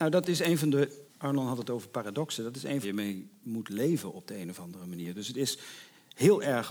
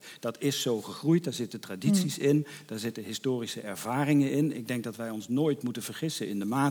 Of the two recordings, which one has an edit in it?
first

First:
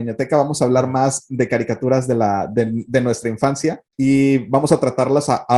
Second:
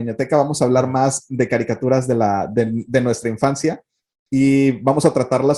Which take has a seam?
first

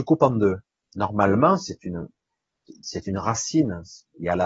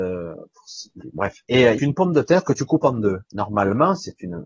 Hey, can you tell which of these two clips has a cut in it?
second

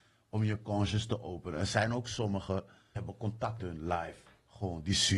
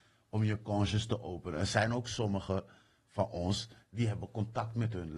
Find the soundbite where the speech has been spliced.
first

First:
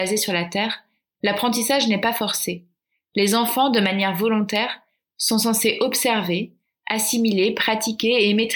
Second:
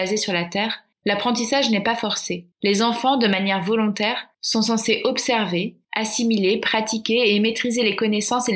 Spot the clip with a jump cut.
second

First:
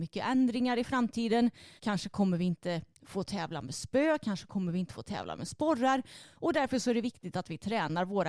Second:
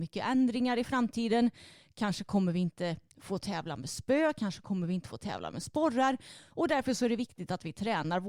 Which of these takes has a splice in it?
first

